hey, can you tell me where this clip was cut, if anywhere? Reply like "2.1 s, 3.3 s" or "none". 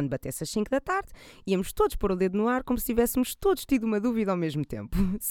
none

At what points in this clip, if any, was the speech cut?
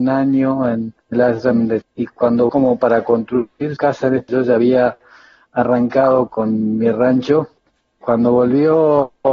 1.1 s, 1.8 s, 2.5 s, 3.8 s, 4.3 s, 6.3 s, 8.0 s

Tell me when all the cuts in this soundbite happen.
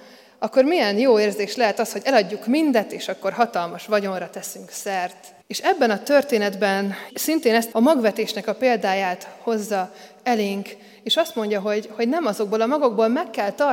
5.4 s, 7.1 s, 7.7 s

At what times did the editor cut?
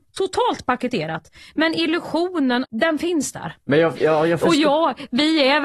none

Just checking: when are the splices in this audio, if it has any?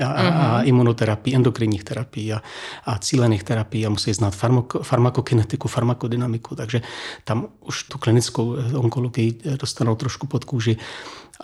7.9 s

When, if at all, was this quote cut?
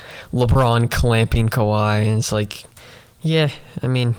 none

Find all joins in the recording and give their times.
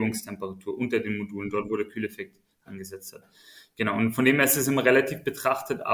none

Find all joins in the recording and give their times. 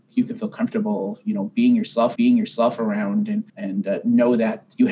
2.1 s, 3.5 s

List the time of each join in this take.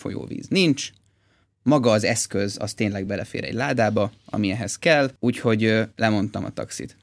none

